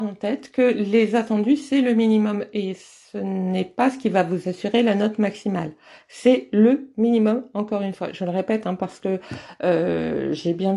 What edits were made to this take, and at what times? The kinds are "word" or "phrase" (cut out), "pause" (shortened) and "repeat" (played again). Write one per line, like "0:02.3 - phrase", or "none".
none

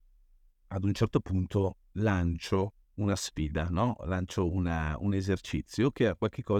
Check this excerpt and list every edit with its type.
0:02.8 - pause

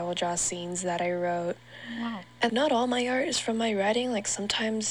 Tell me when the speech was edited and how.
0:02.5 - word

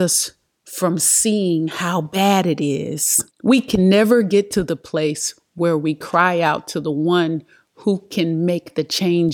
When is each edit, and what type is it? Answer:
0:03.3 - pause

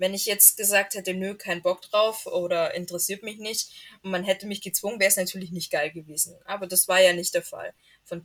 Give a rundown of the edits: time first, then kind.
none

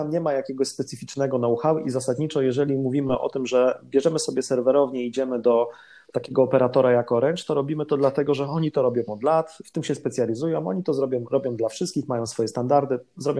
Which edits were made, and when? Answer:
none

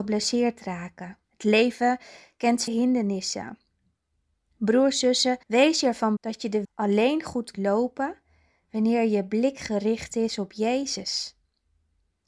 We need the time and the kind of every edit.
0:01.2 - pause
0:02.7 - word
0:05.4 - pause
0:06.2 - word
0:06.6 - word
0:07.5 - word

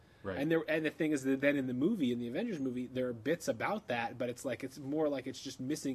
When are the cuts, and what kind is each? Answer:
none

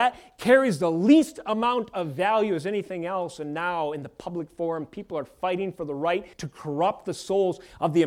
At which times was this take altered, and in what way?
0:06.3 - pause

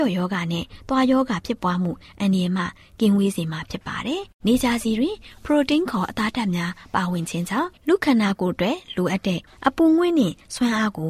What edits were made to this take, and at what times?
0:04.4 - pause

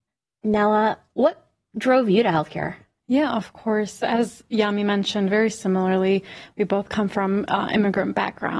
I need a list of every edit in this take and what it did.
none

